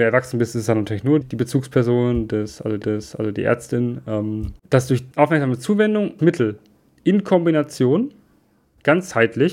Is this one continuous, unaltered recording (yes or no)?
no